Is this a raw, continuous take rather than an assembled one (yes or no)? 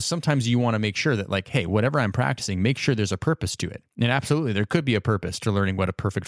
yes